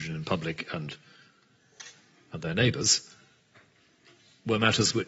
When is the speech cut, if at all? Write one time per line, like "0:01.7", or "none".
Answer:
none